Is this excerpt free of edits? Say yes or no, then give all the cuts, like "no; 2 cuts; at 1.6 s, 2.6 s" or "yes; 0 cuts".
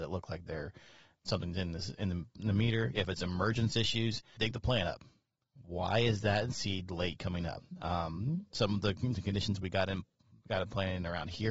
no; 2 cuts; at 1.1 s, 4.4 s